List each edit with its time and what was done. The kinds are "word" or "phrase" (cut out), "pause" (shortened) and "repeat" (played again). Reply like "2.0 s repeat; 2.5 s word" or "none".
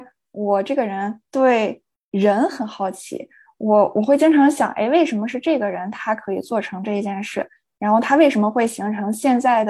none